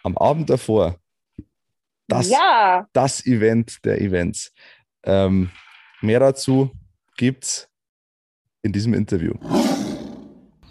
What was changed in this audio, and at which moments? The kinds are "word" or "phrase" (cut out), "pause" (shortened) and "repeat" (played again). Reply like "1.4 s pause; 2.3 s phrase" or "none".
none